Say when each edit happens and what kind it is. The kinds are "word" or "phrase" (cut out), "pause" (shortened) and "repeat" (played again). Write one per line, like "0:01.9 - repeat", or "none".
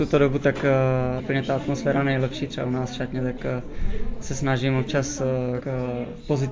0:01.2 - word
0:05.6 - phrase